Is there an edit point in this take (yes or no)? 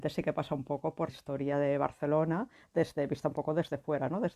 yes